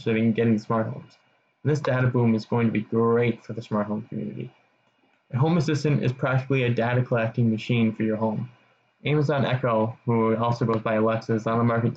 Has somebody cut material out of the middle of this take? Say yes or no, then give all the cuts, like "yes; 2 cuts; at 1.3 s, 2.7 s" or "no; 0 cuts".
no; 0 cuts